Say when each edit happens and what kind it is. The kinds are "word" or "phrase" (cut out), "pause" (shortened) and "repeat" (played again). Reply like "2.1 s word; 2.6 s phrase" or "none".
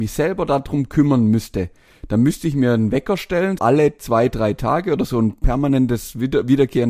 3.6 s word